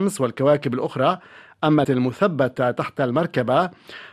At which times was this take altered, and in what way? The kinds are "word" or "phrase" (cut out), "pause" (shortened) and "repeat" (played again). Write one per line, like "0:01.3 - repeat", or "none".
0:01.8 - word